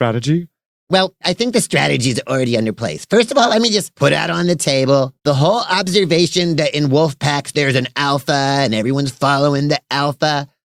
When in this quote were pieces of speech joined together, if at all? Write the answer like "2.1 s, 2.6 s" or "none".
5.2 s